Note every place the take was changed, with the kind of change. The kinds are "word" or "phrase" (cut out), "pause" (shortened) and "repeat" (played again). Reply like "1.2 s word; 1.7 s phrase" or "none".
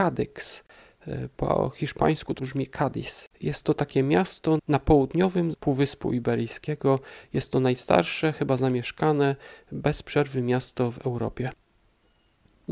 2.4 s word; 3.3 s pause; 4.6 s word; 5.5 s word